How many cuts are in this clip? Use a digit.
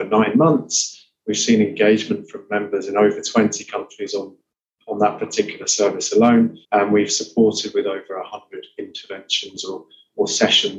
1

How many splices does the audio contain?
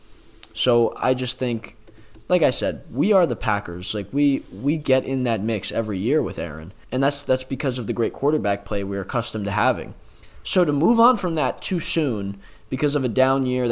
1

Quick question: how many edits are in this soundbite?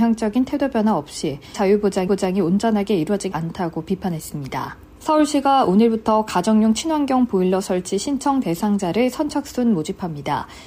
4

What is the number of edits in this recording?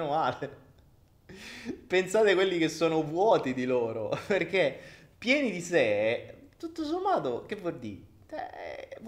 0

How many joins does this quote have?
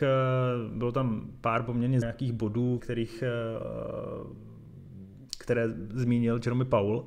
3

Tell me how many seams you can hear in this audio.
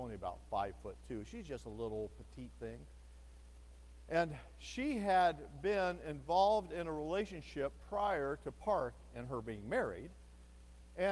0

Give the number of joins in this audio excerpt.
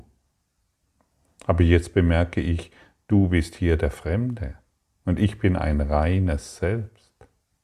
0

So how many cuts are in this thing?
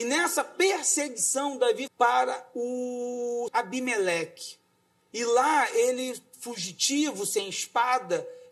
3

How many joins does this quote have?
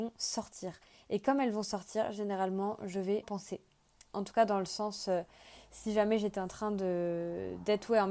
1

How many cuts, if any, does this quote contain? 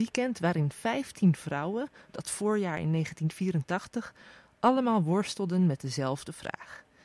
0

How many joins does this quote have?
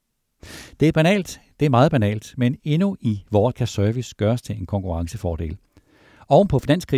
1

